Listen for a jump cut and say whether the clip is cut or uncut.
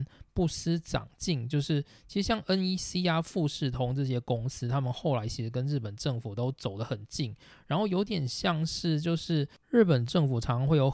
uncut